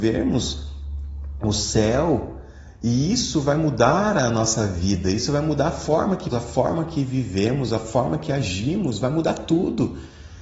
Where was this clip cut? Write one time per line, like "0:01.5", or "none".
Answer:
0:06.3